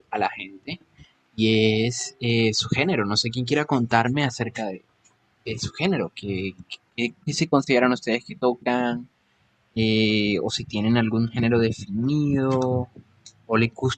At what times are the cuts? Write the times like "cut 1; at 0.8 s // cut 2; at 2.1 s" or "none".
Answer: none